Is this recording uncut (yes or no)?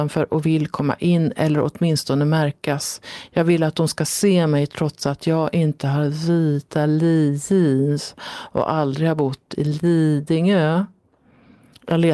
yes